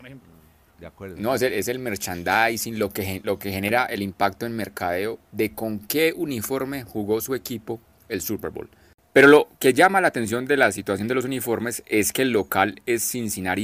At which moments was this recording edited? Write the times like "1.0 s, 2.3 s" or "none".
none